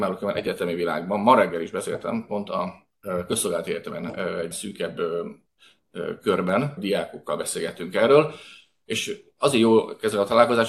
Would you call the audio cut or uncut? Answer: cut